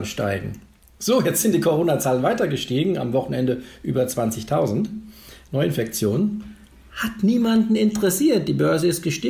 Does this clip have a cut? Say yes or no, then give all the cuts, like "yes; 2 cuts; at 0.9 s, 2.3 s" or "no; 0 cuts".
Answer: no; 0 cuts